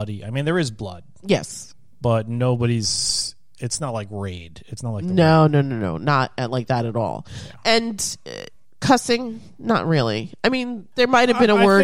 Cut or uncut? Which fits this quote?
uncut